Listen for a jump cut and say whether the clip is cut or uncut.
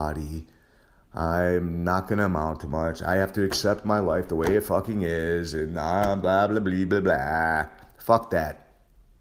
uncut